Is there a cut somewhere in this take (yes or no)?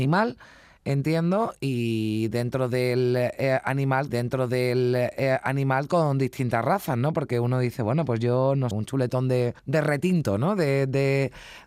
yes